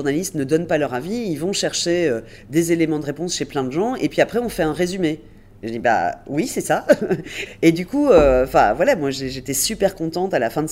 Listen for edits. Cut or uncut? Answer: uncut